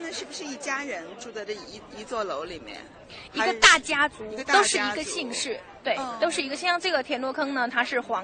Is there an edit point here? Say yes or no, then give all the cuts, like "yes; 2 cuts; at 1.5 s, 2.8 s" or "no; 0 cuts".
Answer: no; 0 cuts